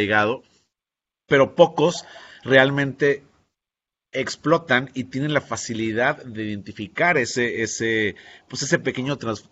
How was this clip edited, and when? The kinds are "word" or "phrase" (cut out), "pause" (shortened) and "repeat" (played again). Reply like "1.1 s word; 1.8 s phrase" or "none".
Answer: none